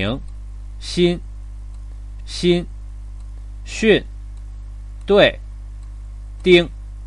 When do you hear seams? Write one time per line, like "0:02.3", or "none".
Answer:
0:02.2